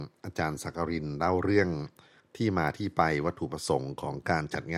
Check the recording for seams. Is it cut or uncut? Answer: uncut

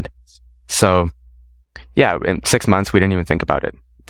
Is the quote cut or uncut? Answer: uncut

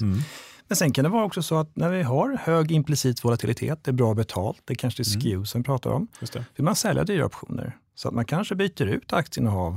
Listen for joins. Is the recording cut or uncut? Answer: uncut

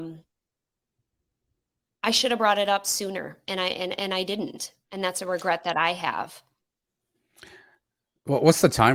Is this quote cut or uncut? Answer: cut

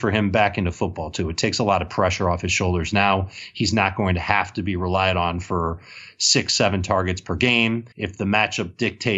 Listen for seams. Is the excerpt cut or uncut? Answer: cut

